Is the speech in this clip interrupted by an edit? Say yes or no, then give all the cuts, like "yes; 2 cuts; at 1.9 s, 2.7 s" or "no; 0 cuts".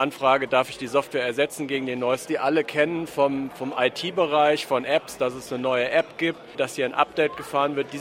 yes; 1 cut; at 2.3 s